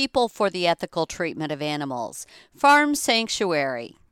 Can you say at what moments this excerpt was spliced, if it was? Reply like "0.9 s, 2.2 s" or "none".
none